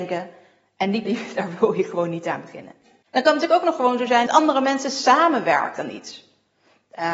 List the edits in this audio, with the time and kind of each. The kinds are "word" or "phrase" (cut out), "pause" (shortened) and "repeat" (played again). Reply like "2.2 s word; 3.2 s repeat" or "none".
1.0 s word; 4.3 s phrase

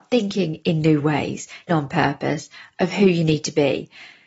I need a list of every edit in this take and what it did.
1.7 s word

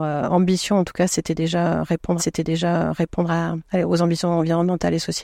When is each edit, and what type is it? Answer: 2.2 s repeat

